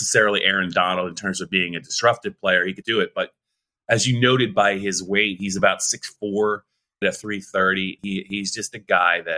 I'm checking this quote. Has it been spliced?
yes; 3 cuts; at 2.8 s, 7.0 s, 8.0 s

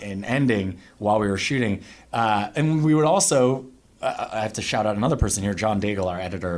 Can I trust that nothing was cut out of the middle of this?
yes; 0 cuts

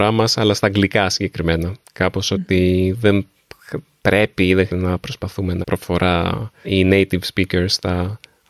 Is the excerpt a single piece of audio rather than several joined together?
no; 3 cuts; at 4.7 s, 5.6 s, 6.6 s

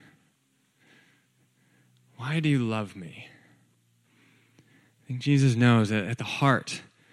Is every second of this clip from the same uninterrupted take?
yes; 0 cuts

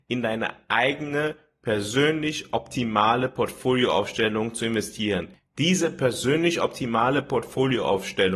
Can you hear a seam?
no; 0 cuts

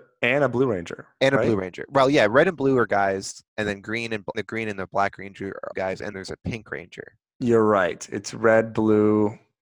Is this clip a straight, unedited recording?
no; 4 cuts; at 3.5 s, 4.3 s, 5.7 s, 6.1 s

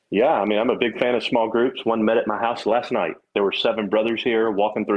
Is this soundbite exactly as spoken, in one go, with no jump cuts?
yes; 0 cuts

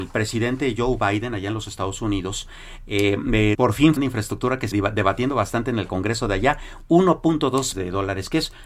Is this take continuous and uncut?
no; 4 cuts; at 3.5 s, 4.0 s, 4.7 s, 7.7 s

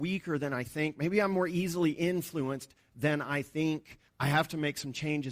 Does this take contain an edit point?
yes; 1 cut; at 4.1 s

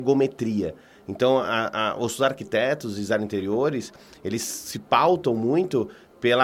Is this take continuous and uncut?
yes; 0 cuts

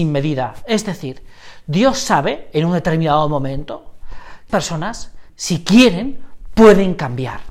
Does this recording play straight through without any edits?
no; 2 cuts; at 4.5 s, 5.3 s

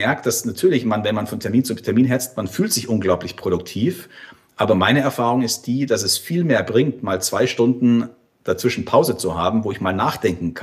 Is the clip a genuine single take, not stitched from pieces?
yes; 0 cuts

